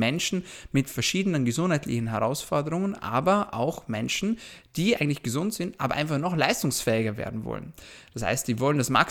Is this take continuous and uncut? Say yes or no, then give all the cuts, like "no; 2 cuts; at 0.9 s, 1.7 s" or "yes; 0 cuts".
yes; 0 cuts